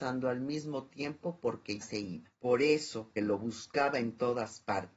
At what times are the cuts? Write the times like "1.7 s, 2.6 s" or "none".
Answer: 1.8 s, 2.4 s, 3.2 s